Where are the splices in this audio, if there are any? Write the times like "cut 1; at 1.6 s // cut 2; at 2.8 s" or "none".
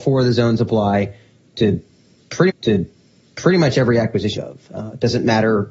cut 1; at 2.5 s // cut 2; at 4.4 s